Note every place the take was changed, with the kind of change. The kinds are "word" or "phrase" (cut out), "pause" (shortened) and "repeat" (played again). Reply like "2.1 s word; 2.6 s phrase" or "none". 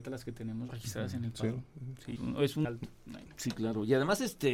2.2 s word; 2.6 s word